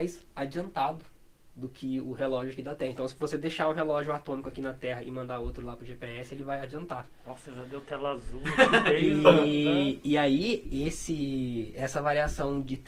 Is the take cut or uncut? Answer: cut